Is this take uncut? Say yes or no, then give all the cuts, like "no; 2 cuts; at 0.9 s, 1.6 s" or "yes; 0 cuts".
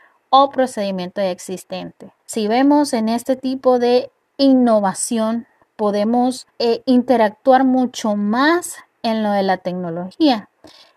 no; 2 cuts; at 2.2 s, 6.5 s